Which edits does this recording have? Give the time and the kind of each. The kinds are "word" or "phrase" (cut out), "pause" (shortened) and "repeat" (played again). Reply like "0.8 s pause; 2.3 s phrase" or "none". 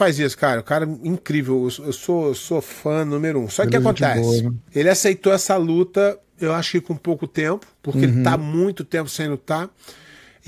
4.7 s pause; 7.7 s pause